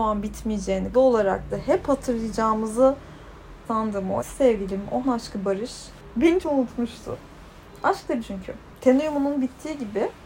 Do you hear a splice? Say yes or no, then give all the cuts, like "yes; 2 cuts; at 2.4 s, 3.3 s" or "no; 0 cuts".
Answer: yes; 7 cuts; at 0.9 s, 1.5 s, 3.6 s, 4.2 s, 5.0 s, 6.4 s, 8.2 s